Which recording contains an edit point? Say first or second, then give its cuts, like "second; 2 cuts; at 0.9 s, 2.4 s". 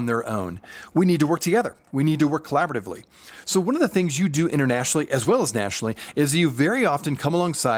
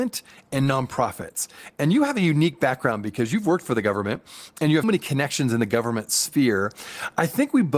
second; 1 cut; at 4.8 s